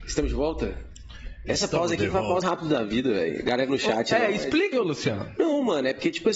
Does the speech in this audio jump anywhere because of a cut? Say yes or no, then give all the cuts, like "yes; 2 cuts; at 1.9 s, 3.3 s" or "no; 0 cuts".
yes; 3 cuts; at 2.4 s, 3.7 s, 4.7 s